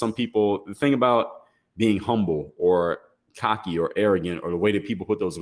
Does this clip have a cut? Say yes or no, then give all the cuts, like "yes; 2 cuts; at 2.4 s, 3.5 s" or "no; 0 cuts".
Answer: no; 0 cuts